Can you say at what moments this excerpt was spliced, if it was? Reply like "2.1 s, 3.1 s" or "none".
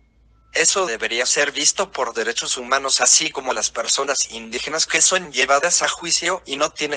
none